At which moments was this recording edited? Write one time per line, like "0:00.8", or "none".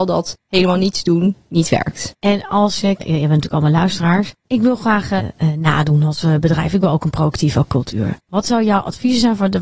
0:02.2
0:03.0
0:04.4
0:05.2
0:08.2